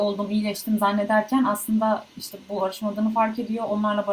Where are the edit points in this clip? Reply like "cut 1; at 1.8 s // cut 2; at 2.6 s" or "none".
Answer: cut 1; at 2.6 s